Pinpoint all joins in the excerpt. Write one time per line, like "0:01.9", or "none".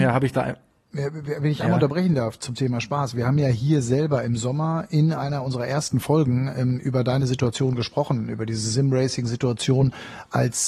none